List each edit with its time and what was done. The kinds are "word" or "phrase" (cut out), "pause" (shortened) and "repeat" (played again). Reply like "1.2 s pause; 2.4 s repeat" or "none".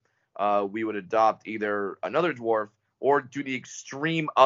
none